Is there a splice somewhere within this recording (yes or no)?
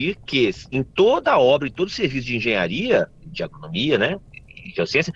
no